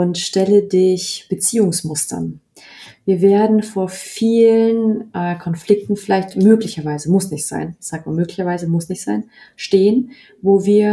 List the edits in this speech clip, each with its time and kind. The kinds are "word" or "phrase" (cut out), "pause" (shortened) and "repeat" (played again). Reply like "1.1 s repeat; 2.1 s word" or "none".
none